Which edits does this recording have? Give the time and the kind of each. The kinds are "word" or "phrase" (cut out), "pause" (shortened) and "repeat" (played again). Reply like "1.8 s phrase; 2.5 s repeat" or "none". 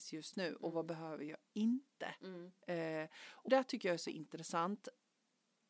3.5 s word